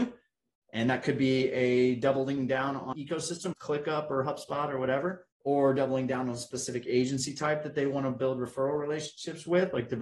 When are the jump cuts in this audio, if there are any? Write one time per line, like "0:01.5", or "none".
0:02.9
0:03.5
0:05.3